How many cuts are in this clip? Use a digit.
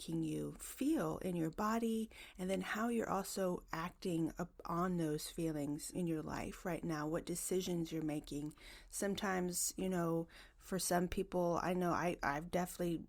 1